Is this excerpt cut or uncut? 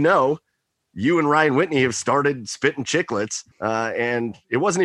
cut